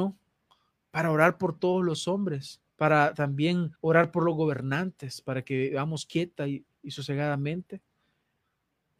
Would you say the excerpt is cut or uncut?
cut